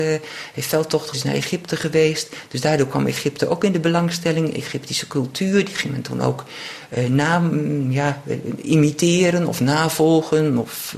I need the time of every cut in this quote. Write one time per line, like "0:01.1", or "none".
0:01.1